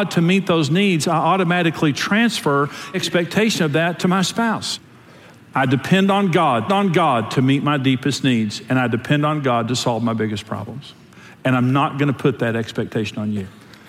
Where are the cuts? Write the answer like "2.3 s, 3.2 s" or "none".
2.9 s, 6.7 s